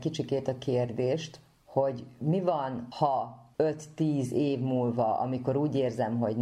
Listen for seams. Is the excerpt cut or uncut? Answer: uncut